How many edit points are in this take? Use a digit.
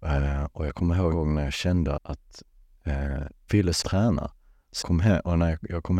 5